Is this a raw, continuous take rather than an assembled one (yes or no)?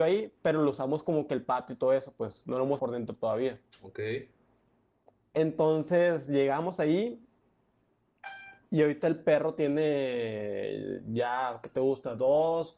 no